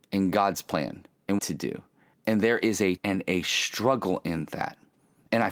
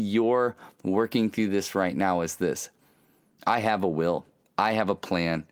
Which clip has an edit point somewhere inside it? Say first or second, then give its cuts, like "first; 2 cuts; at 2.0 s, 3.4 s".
first; 3 cuts; at 1.4 s, 2.1 s, 3.0 s